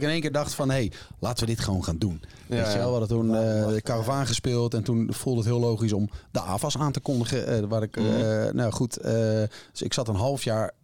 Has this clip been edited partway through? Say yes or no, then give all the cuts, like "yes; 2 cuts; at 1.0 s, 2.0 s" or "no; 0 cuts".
no; 0 cuts